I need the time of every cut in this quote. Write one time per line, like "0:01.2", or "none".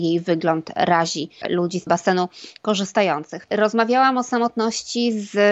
0:01.4
0:01.9